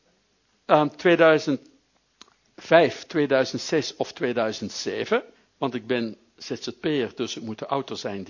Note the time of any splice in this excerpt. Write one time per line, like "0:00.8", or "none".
0:05.4